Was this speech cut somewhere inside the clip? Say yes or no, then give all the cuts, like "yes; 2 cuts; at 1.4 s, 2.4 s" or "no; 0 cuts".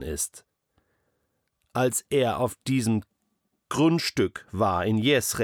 no; 0 cuts